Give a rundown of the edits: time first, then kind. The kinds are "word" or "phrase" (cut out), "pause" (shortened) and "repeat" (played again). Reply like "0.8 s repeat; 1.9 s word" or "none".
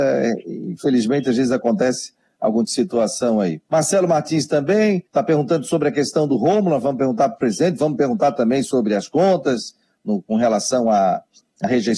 2.6 s word; 3.7 s pause; 5.1 s pause